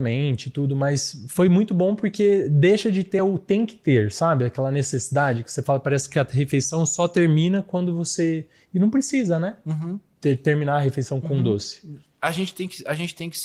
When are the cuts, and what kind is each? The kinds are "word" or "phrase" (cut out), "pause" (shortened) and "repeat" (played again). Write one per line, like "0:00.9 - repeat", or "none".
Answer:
none